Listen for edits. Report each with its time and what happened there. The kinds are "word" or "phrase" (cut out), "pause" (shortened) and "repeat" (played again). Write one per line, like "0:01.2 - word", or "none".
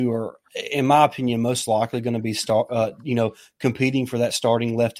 none